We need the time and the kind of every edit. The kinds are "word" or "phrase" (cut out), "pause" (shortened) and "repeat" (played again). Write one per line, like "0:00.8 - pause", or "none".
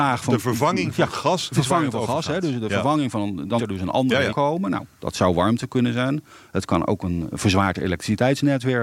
0:01.5 - word
0:03.6 - word
0:04.3 - word
0:07.3 - word